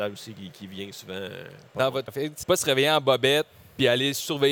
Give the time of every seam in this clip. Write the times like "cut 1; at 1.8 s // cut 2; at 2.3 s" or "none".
cut 1; at 2.1 s // cut 2; at 2.4 s